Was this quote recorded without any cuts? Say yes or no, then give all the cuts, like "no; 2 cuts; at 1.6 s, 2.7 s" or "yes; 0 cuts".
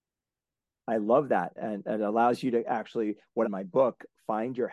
no; 2 cuts; at 1.6 s, 3.4 s